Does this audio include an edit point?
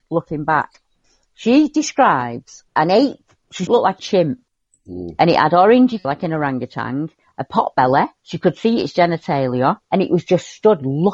yes; 6 cuts; at 2.7 s, 3.7 s, 4.0 s, 6.0 s, 8.2 s, 9.8 s

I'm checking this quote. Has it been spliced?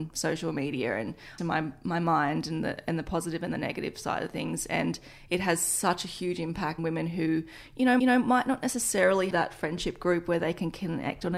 yes; 4 cuts; at 1.4 s, 6.8 s, 8.0 s, 9.3 s

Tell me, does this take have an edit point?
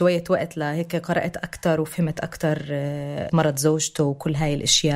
yes; 1 cut; at 3.3 s

